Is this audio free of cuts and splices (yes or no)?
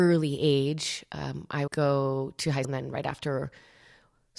no